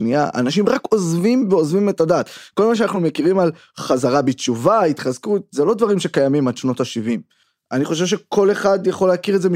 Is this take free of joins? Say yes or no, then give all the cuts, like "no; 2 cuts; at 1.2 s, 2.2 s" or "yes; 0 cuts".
yes; 0 cuts